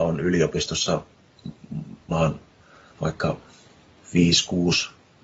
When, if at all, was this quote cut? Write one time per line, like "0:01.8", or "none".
0:02.1
0:02.9